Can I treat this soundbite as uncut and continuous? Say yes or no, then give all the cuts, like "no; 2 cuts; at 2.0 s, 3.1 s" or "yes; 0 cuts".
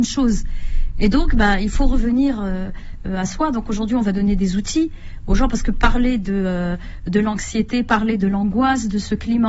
yes; 0 cuts